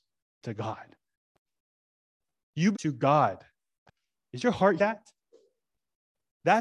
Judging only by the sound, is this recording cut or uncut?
cut